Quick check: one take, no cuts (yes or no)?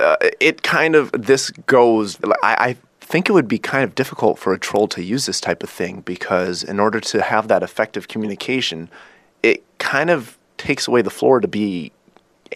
no